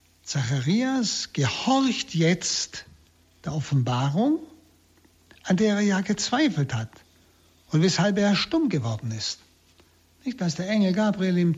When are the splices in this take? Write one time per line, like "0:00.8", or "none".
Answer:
none